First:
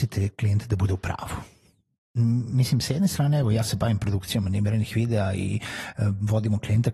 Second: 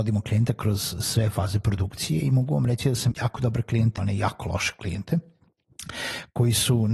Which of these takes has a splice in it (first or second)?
second